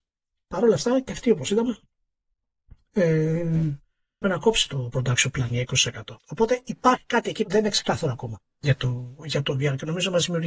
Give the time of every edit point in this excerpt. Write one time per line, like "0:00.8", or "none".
0:04.2
0:06.2
0:07.4